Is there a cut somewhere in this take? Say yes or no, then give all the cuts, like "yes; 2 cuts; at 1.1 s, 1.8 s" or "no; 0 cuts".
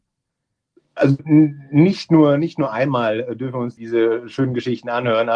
yes; 1 cut; at 3.8 s